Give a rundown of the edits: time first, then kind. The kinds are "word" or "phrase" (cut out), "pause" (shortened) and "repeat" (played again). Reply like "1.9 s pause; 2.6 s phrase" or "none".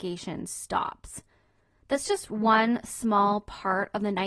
none